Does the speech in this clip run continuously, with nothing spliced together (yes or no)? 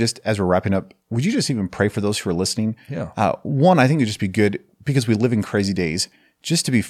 yes